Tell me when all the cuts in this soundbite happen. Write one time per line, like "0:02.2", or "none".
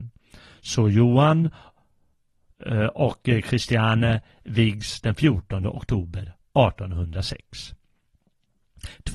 none